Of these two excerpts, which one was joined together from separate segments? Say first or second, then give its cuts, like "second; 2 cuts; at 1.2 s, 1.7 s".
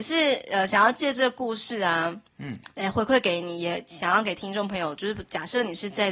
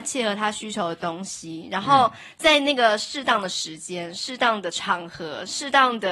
first; 1 cut; at 2.3 s